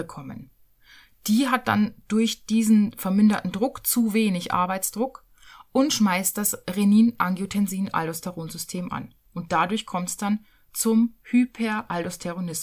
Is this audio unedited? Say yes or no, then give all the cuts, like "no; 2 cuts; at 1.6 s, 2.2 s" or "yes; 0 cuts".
yes; 0 cuts